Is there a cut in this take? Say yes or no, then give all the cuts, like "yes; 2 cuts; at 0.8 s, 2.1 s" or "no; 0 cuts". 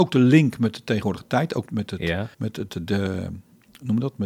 yes; 2 cuts; at 1.7 s, 2.3 s